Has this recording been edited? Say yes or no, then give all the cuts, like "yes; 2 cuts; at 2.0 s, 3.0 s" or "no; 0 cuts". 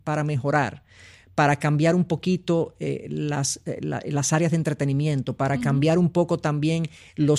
no; 0 cuts